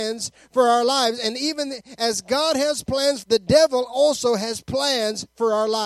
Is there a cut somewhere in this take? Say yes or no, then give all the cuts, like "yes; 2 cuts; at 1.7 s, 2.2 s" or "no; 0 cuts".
yes; 1 cut; at 3.2 s